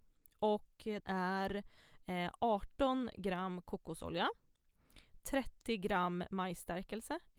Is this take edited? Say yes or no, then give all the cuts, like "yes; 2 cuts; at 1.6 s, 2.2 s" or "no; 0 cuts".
yes; 1 cut; at 1.0 s